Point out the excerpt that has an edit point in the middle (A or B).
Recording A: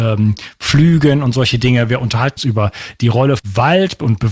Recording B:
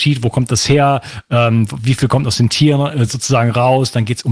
A